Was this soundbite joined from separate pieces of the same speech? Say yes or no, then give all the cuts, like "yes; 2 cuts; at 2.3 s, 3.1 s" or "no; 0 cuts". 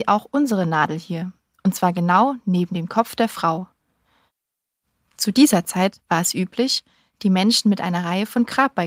no; 0 cuts